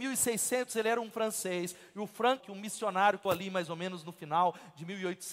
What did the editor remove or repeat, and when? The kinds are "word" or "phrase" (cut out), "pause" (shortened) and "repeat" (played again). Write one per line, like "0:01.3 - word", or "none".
0:01.1 - word
0:02.4 - word
0:03.3 - word